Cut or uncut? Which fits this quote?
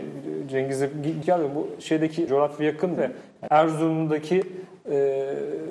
cut